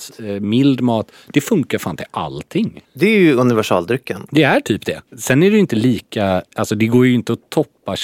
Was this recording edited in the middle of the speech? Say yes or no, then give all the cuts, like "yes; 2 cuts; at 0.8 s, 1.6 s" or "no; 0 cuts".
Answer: yes; 3 cuts; at 2.8 s, 5.1 s, 6.5 s